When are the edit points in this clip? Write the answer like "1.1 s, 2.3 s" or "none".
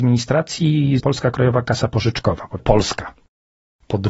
1.0 s, 2.6 s